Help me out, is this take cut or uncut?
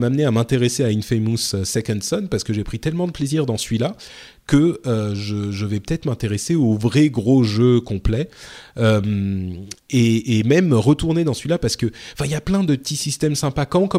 cut